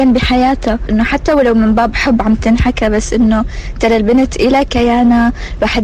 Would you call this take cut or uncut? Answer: uncut